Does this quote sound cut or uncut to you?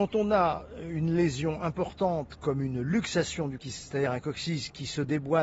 cut